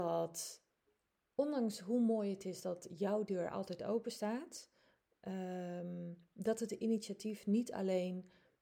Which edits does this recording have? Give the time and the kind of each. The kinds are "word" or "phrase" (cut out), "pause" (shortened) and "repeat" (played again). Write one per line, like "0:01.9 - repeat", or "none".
0:06.3 - pause

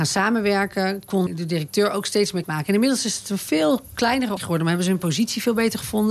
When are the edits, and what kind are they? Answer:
0:01.3 - word
0:02.4 - word
0:04.4 - word

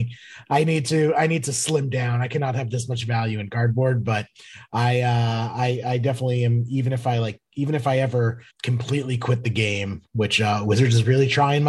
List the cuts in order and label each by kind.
0:08.5 - pause

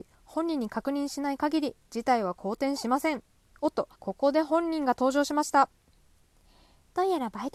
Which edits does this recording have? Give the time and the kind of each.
0:03.4 - pause
0:03.9 - pause

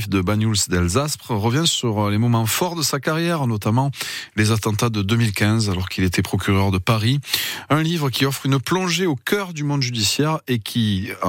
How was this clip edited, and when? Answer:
none

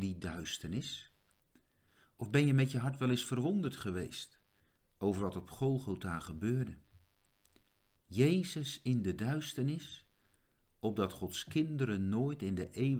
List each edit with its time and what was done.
none

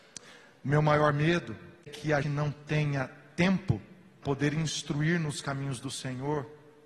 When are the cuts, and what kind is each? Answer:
0:01.8 - word
0:02.2 - word
0:04.2 - word

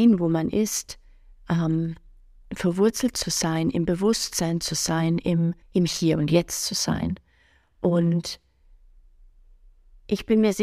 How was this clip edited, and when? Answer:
0:05.6 - pause

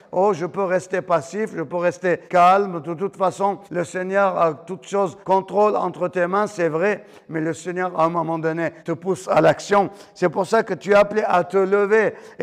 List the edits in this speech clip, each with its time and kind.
0:02.3 - pause
0:03.7 - pause
0:05.2 - pause
0:08.8 - pause

